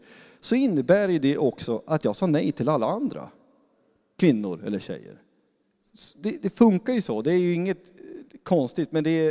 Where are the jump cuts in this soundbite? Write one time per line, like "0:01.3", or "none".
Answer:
none